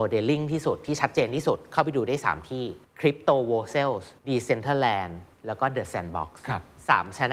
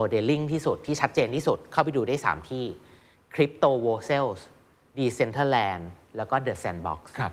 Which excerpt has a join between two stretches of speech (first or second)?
first